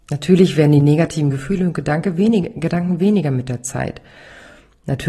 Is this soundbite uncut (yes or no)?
yes